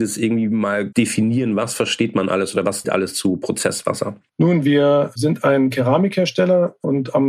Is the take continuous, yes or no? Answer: no